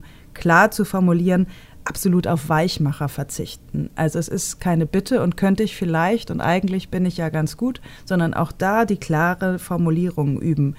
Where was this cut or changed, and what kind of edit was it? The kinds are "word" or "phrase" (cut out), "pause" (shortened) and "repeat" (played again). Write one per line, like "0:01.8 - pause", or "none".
none